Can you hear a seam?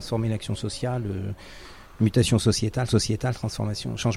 yes; 1 cut; at 2.9 s

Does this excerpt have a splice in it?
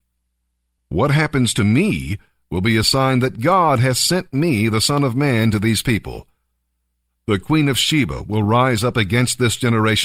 no; 0 cuts

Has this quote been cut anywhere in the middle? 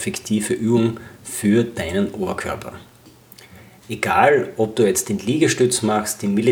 no; 0 cuts

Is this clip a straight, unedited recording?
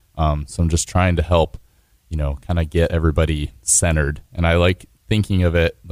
yes; 0 cuts

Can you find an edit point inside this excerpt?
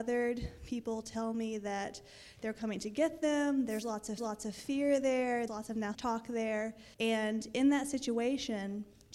yes; 4 cuts; at 4.2 s, 5.5 s, 5.9 s, 6.9 s

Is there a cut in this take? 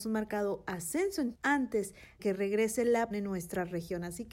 yes; 3 cuts; at 1.3 s, 2.2 s, 3.1 s

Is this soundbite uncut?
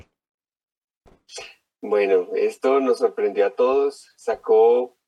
yes; 0 cuts

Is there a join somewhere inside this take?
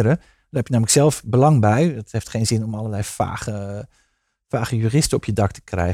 no; 0 cuts

